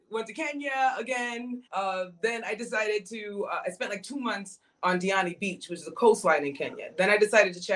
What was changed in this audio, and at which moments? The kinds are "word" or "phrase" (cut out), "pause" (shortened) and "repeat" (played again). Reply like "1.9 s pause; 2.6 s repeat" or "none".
1.7 s pause